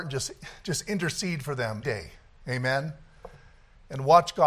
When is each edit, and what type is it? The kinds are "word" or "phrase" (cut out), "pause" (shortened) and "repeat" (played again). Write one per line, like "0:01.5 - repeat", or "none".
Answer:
0:01.8 - word